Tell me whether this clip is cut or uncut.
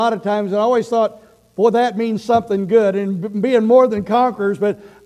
uncut